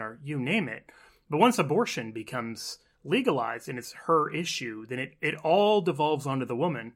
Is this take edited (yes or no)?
no